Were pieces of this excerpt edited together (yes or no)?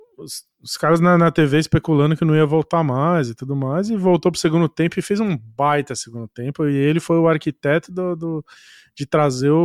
no